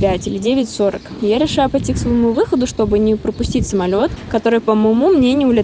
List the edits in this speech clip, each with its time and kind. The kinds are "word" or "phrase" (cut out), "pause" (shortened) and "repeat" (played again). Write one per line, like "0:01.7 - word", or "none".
none